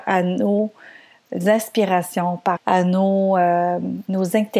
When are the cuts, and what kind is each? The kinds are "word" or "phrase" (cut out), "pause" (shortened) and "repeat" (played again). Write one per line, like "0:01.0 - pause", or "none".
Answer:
0:02.6 - word